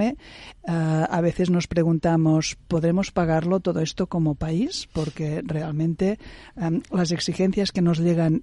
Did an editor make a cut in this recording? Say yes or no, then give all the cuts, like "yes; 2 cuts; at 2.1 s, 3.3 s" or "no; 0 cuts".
no; 0 cuts